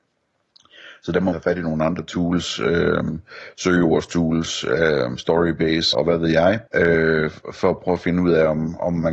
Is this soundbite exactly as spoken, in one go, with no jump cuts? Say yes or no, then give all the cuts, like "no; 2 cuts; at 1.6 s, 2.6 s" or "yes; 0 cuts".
no; 3 cuts; at 1.3 s, 5.9 s, 6.7 s